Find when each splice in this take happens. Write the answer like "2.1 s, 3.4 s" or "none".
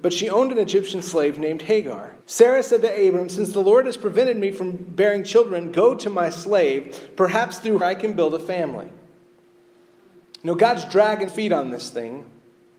2.2 s, 7.8 s, 11.3 s